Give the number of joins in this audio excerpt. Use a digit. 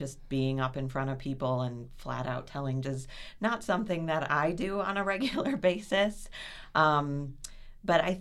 1